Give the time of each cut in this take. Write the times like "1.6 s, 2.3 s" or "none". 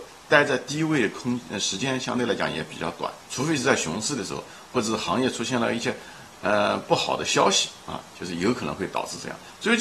3.2 s

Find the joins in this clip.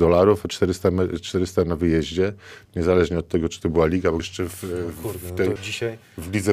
4.2 s, 5.6 s

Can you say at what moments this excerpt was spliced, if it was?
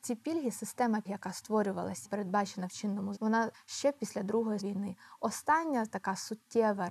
1.0 s, 2.0 s, 3.2 s, 3.5 s, 4.6 s

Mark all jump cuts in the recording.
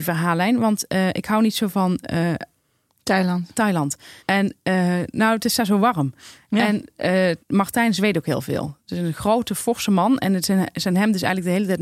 4.2 s, 7.4 s

